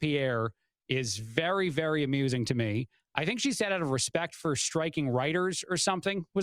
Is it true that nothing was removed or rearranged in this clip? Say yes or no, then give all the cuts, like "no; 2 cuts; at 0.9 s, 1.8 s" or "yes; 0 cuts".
yes; 0 cuts